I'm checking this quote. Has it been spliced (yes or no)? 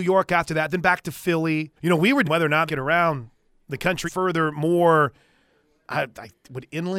yes